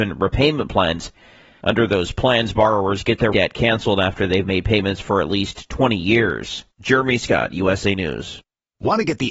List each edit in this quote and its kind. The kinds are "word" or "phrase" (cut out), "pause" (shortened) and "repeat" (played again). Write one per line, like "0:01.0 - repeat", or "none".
0:03.3 - word